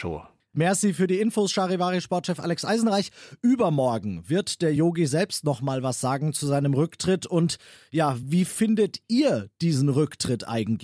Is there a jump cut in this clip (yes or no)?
no